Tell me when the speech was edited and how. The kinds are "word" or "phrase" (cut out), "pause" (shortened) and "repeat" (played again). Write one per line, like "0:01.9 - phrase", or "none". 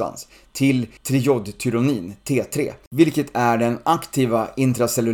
0:01.0 - pause